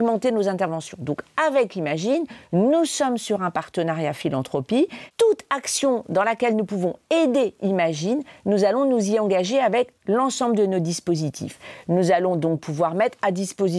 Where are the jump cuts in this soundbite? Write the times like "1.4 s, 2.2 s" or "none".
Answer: none